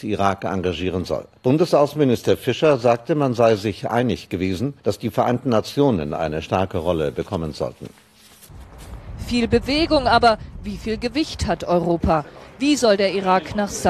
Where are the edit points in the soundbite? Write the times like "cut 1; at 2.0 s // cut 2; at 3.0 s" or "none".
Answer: cut 1; at 1.4 s // cut 2; at 4.8 s